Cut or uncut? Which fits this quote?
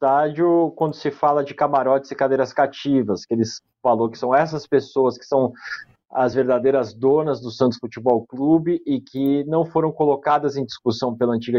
uncut